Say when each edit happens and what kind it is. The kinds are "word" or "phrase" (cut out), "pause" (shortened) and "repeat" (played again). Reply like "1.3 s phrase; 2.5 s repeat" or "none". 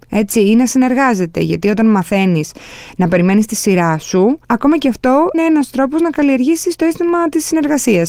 4.4 s pause; 5.3 s word